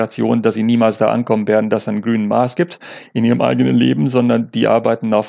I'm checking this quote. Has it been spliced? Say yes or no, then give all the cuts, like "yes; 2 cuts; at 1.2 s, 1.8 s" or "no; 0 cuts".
no; 0 cuts